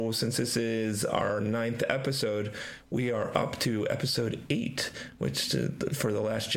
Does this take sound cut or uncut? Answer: uncut